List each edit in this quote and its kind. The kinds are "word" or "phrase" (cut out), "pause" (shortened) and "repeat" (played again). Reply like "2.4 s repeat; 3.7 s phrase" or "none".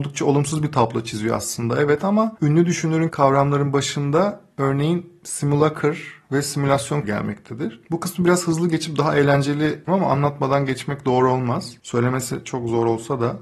3.1 s phrase; 7.0 s word; 9.9 s phrase